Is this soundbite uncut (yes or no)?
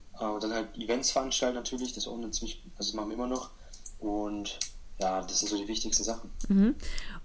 yes